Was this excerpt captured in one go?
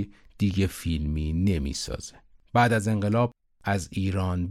yes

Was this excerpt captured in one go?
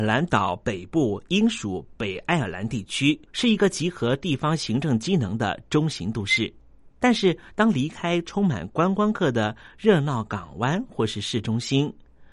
no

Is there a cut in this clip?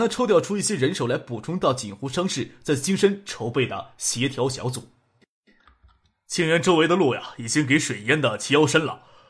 no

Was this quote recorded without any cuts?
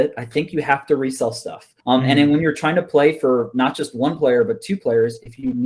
no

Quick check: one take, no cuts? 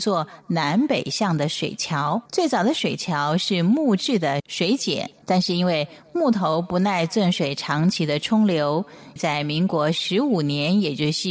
no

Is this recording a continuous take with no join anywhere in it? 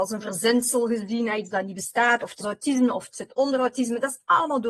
no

